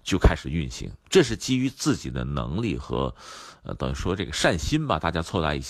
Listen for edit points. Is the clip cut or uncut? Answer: cut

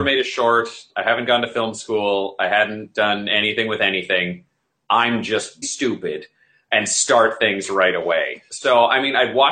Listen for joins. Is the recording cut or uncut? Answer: cut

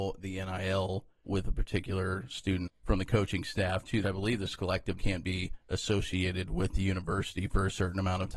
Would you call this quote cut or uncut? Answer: cut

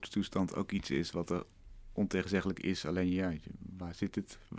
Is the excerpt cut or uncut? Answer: uncut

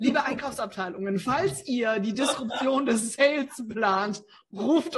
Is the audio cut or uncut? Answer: uncut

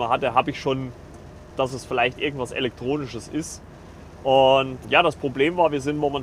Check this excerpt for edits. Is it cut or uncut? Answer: cut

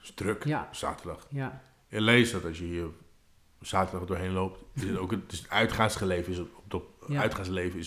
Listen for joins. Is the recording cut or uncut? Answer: uncut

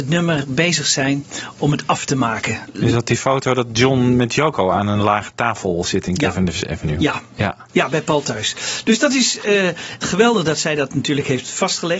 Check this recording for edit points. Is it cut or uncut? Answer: uncut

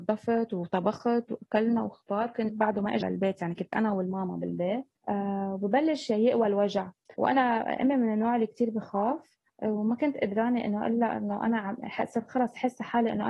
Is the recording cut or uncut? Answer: cut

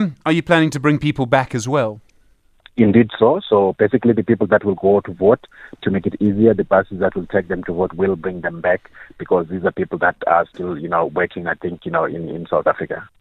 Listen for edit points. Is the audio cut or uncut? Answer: uncut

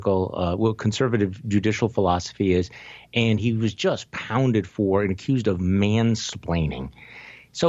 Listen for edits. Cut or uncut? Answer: uncut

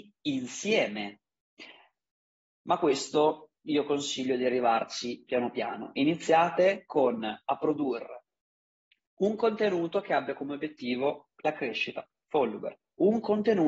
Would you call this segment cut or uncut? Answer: cut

